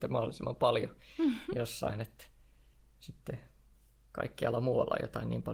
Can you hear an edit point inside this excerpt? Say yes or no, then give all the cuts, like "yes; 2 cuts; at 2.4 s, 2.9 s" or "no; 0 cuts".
no; 0 cuts